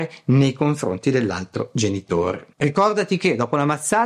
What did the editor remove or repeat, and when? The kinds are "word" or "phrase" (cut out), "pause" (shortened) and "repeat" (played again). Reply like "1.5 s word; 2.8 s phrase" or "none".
2.5 s pause